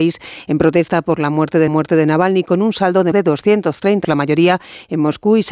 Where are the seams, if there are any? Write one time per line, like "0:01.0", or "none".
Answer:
0:01.7
0:03.1
0:04.0